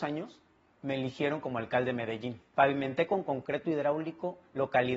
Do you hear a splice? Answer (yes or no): no